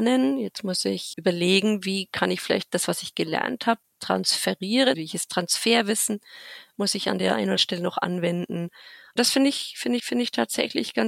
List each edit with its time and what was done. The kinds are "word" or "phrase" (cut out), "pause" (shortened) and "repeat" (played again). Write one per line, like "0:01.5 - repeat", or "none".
0:01.1 - word
0:04.9 - word
0:07.6 - word
0:10.0 - repeat